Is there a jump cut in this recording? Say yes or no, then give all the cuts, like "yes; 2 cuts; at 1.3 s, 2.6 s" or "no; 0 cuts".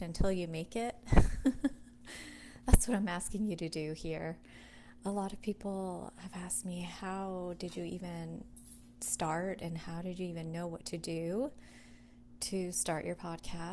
no; 0 cuts